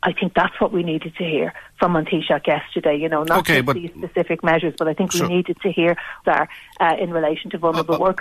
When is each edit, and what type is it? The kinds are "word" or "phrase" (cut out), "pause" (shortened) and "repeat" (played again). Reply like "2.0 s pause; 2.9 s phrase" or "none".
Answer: 6.2 s phrase